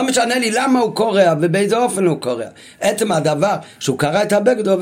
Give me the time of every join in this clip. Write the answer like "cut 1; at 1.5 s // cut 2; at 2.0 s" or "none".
none